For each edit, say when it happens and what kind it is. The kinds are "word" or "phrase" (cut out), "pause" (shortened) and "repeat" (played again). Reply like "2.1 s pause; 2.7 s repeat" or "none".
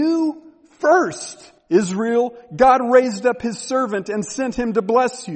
1.6 s pause